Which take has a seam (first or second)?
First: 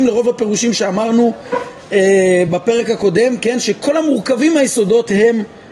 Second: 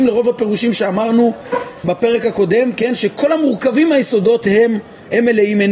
second